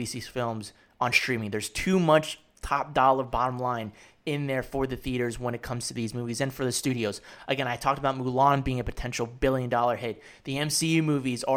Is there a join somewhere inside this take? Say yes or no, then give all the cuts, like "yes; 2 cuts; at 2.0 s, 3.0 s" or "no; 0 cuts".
no; 0 cuts